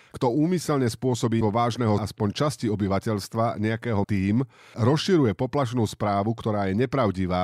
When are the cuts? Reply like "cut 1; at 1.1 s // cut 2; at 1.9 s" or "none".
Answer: cut 1; at 1.4 s // cut 2; at 2.0 s // cut 3; at 4.0 s // cut 4; at 4.7 s

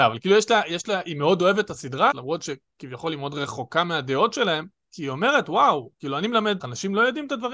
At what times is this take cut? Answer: cut 1; at 2.1 s // cut 2; at 4.9 s // cut 3; at 5.9 s // cut 4; at 6.6 s

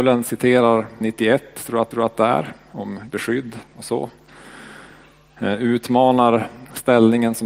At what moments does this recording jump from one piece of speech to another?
cut 1; at 1.0 s // cut 2; at 1.9 s // cut 3; at 3.1 s

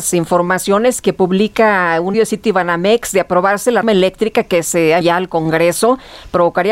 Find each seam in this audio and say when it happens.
cut 1; at 2.1 s // cut 2; at 3.8 s // cut 3; at 5.0 s

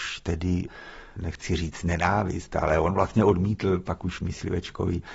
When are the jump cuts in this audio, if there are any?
cut 1; at 1.2 s

